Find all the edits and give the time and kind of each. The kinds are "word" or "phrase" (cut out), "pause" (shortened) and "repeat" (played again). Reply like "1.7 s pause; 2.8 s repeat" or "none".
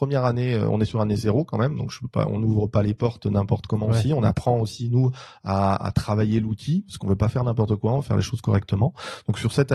none

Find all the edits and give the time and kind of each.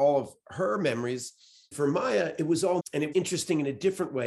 1.7 s word; 2.8 s word; 3.1 s word

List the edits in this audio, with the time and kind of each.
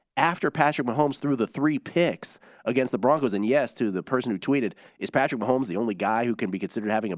none

